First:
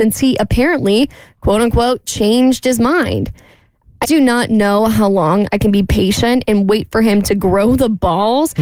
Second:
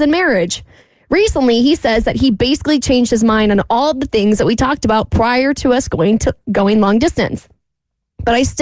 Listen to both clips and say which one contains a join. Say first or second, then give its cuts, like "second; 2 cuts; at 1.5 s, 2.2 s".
first; 1 cut; at 4.0 s